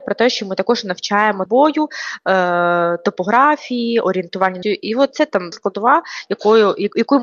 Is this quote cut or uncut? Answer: cut